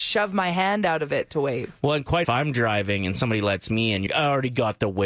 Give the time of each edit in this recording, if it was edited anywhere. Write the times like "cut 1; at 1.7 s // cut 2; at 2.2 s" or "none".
cut 1; at 2.2 s // cut 2; at 4.1 s

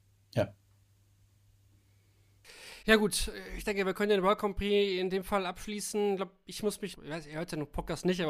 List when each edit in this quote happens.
cut 1; at 2.8 s // cut 2; at 6.9 s

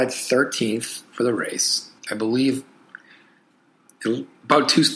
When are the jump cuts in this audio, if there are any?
cut 1; at 2.0 s

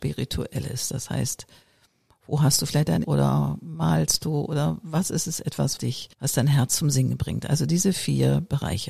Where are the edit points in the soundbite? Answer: cut 1; at 3.0 s // cut 2; at 5.8 s // cut 3; at 6.1 s

